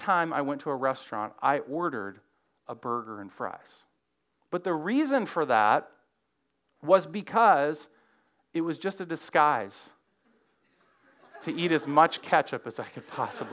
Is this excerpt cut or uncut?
uncut